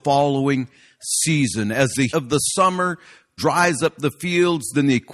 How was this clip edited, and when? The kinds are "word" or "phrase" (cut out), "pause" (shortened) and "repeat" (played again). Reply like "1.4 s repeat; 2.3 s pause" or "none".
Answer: 2.1 s word; 3.4 s phrase